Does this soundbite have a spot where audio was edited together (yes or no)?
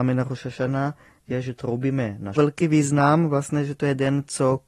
yes